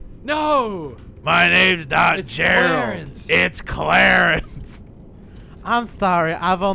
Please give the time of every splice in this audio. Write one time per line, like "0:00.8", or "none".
none